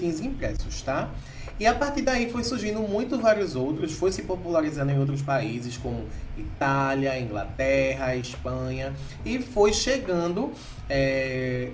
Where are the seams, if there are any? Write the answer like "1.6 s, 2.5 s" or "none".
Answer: none